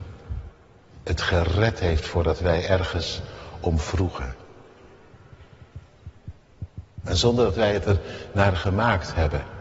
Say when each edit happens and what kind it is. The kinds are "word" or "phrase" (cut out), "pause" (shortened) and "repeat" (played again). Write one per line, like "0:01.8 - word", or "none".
none